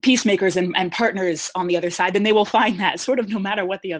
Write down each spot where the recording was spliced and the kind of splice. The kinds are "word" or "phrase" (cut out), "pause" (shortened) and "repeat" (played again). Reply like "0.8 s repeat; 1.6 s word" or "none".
none